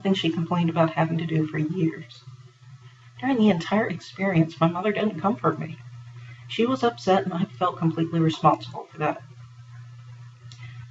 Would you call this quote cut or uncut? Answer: uncut